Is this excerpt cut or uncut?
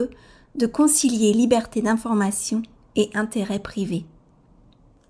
uncut